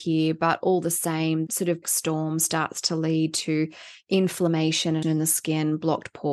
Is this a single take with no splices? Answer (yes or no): no